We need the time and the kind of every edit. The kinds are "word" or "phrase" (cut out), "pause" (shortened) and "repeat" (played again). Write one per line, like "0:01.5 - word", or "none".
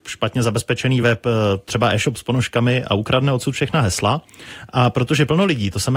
none